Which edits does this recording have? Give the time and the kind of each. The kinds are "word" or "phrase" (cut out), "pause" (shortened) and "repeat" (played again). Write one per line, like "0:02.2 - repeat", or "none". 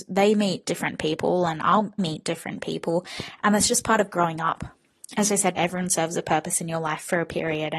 0:02.0 - word
0:05.6 - word